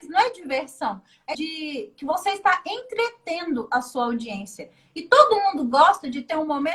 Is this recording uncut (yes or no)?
no